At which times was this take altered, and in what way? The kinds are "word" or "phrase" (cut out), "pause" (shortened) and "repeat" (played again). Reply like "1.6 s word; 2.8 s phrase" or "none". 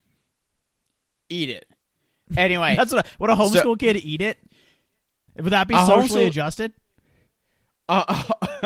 none

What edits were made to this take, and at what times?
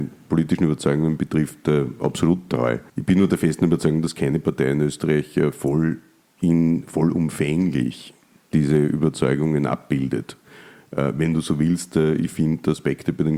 2.9 s pause

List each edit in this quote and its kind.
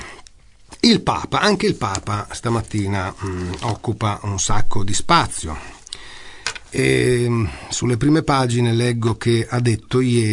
none

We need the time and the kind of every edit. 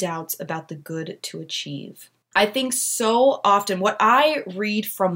2.2 s pause

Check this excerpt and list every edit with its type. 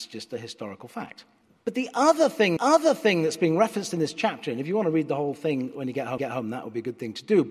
1.4 s pause; 2.6 s repeat; 6.2 s repeat

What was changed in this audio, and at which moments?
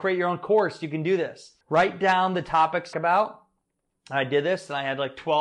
1.6 s pause; 2.9 s phrase

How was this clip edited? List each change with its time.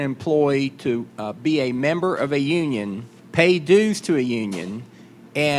1.1 s pause; 3.2 s pause

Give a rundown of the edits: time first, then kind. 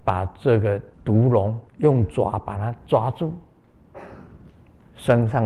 0.9 s pause; 1.7 s pause

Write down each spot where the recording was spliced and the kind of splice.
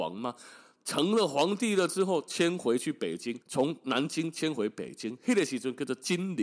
3.4 s pause

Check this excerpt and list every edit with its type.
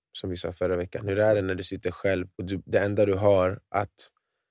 2.3 s pause

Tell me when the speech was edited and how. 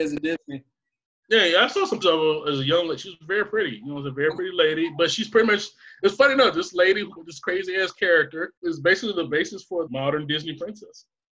2.0 s word; 7.2 s phrase; 8.6 s pause; 9.9 s word

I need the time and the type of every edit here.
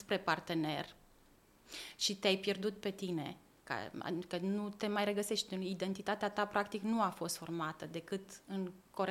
none

